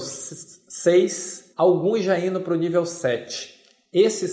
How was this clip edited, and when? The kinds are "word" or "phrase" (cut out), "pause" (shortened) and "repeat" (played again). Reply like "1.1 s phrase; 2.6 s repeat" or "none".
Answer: 1.5 s pause